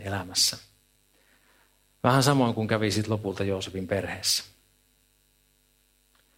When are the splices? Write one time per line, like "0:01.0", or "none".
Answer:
none